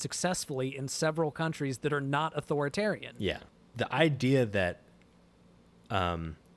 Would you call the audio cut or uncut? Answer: uncut